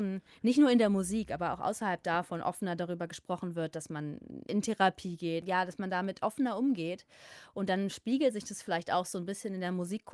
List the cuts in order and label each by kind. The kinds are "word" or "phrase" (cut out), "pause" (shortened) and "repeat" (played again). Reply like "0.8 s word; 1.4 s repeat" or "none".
4.4 s pause